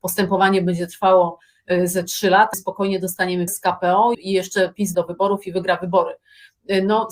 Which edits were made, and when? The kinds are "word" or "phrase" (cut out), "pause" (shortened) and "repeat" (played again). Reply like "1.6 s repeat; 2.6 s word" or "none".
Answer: 2.5 s word; 3.5 s word; 4.1 s word; 4.9 s word